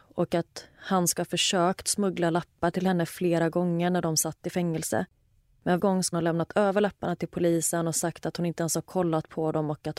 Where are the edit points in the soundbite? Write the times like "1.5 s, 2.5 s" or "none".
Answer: 5.8 s, 6.1 s